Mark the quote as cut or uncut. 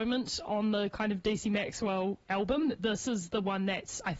uncut